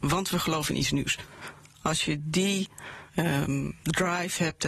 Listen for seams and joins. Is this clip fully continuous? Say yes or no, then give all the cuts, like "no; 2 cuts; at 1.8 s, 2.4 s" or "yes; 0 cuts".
no; 1 cut; at 3.1 s